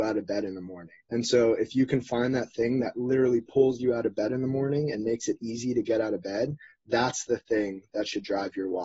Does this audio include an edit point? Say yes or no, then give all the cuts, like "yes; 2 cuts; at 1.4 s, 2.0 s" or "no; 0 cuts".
yes; 1 cut; at 1.0 s